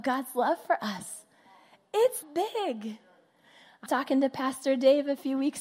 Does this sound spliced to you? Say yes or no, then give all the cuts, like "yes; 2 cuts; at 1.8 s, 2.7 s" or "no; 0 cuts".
yes; 2 cuts; at 2.2 s, 3.9 s